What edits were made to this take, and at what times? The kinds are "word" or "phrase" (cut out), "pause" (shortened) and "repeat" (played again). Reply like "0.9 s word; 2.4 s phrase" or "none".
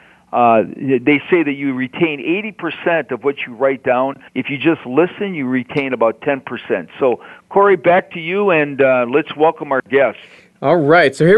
4.3 s pause